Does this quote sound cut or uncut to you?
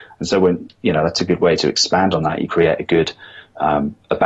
cut